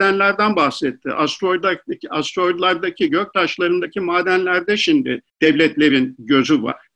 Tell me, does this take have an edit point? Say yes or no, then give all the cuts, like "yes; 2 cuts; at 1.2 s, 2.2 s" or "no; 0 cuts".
yes; 1 cut; at 5.3 s